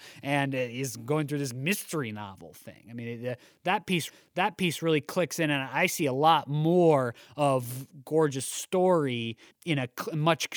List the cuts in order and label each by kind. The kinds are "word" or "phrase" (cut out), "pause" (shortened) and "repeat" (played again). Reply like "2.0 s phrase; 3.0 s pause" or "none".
4.1 s repeat; 9.5 s pause